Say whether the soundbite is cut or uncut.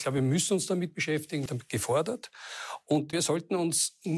cut